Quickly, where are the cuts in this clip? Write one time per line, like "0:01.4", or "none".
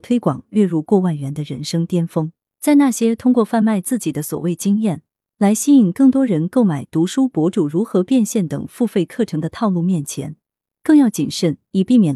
none